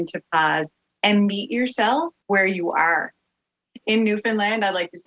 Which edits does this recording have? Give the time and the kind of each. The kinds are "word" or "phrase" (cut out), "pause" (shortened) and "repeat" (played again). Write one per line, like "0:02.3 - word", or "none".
0:02.2 - pause